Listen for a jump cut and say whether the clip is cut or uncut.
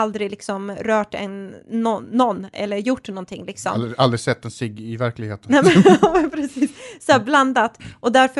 cut